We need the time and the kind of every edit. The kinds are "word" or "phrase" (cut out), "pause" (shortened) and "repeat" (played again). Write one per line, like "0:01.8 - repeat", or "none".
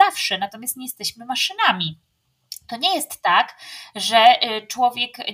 none